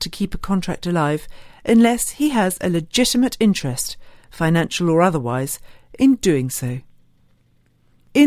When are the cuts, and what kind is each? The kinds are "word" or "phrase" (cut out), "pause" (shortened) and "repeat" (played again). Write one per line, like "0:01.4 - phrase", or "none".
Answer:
none